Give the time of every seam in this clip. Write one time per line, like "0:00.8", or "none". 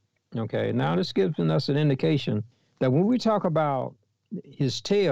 0:02.5